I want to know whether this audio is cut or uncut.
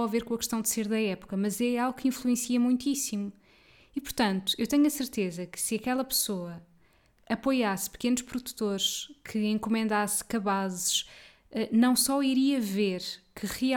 uncut